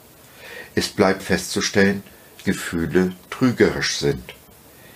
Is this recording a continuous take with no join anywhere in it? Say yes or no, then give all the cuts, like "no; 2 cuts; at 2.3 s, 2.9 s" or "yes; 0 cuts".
no; 2 cuts; at 1.2 s, 2.4 s